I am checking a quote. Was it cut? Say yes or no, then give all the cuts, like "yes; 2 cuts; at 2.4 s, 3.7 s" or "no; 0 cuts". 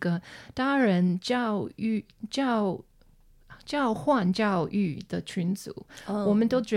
no; 0 cuts